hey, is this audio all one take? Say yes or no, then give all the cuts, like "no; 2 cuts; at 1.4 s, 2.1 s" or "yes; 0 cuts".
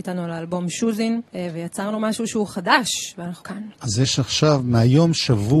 no; 2 cuts; at 1.3 s, 3.4 s